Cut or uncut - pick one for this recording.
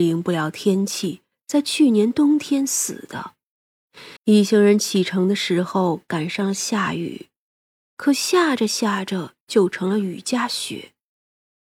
cut